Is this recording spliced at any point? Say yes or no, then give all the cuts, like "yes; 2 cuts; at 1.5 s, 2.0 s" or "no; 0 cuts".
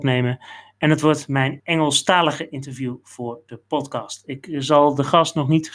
yes; 1 cut; at 1.6 s